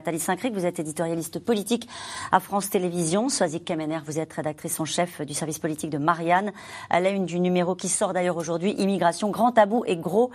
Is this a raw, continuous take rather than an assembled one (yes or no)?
yes